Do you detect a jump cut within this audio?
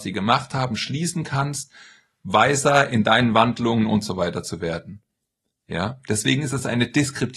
no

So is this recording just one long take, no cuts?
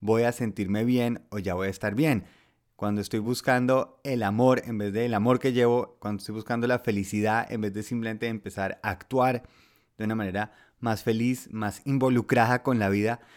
yes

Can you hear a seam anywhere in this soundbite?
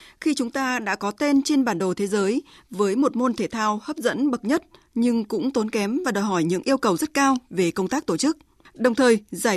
no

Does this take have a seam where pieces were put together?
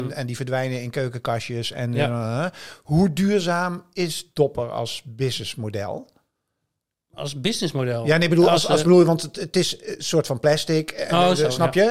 no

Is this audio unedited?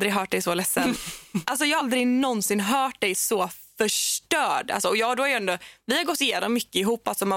no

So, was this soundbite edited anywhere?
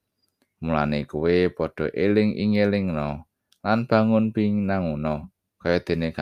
no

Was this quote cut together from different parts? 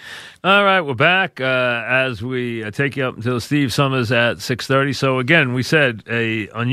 no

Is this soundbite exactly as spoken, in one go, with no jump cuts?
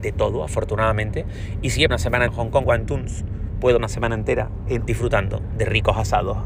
no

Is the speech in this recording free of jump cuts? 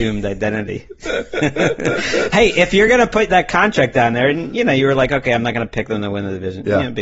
yes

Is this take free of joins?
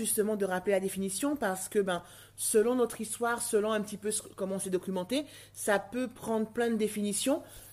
yes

